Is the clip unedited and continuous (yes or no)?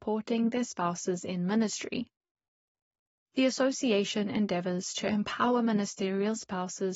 yes